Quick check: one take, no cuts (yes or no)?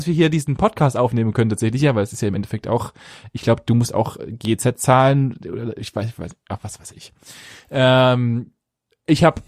yes